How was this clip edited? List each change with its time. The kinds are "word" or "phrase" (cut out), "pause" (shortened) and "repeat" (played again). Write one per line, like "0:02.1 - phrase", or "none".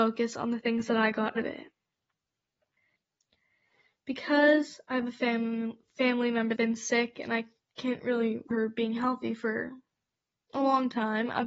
0:01.4 - word
0:06.6 - word
0:08.5 - word